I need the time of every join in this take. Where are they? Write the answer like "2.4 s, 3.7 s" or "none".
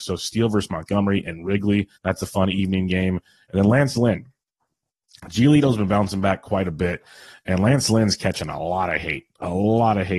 2.0 s